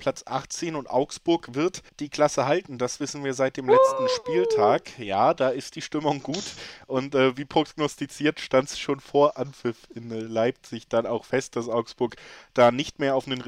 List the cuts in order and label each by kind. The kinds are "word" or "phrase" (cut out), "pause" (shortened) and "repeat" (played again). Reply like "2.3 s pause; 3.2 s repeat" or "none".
1.9 s pause